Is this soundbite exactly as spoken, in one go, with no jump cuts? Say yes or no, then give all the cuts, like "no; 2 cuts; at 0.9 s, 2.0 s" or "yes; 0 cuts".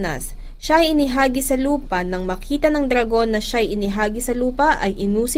yes; 0 cuts